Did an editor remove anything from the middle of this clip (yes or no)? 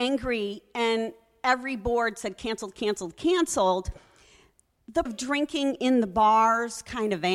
yes